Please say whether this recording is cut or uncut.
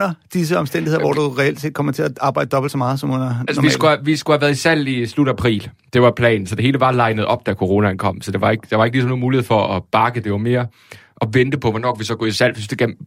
uncut